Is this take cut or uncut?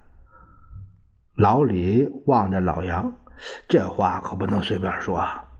uncut